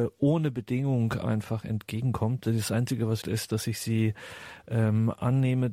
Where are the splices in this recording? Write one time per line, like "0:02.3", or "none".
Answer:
0:03.2